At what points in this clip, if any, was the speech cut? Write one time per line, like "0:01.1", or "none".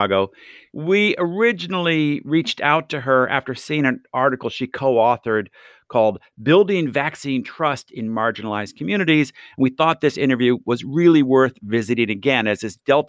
none